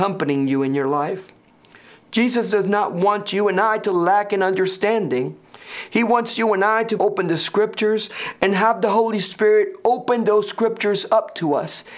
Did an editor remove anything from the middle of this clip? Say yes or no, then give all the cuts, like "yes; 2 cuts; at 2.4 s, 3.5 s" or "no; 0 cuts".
yes; 1 cut; at 7.0 s